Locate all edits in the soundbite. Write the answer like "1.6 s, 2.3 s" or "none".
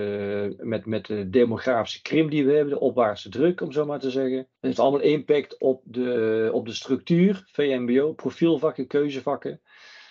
4.6 s